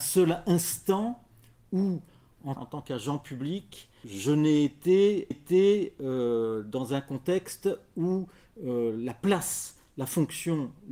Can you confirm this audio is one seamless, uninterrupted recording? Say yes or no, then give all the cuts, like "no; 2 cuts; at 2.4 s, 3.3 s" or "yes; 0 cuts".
no; 3 cuts; at 2.6 s, 4.0 s, 5.3 s